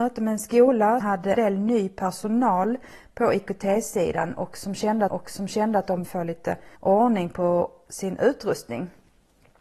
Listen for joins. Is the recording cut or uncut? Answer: cut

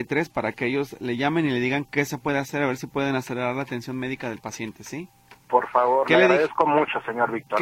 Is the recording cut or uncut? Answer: cut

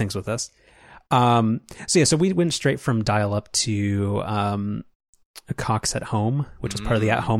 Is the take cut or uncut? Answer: uncut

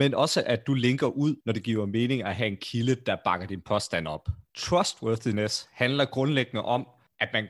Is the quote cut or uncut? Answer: cut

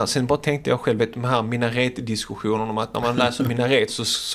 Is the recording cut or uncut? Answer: uncut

